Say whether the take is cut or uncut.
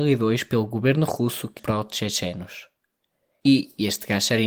cut